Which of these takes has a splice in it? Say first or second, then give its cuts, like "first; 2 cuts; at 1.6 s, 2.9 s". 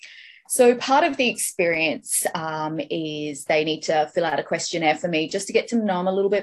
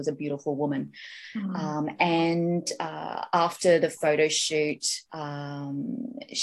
second; 1 cut; at 5.1 s